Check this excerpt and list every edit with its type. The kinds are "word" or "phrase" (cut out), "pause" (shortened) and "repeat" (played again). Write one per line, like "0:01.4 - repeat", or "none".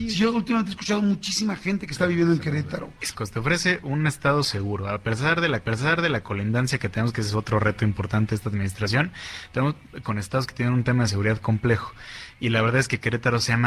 0:03.1 - phrase
0:05.6 - repeat
0:10.0 - word